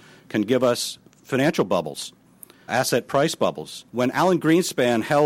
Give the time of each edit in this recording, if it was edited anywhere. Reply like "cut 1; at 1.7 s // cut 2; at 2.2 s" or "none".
cut 1; at 2.7 s // cut 2; at 3.9 s